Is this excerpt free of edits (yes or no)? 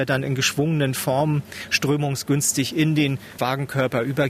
no